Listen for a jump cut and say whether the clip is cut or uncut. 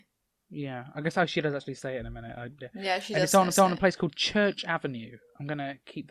cut